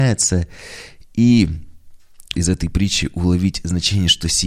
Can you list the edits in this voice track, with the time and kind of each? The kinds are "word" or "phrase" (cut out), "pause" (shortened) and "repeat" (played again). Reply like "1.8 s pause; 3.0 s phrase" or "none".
2.3 s phrase